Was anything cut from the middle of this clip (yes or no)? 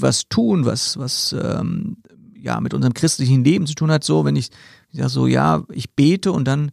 no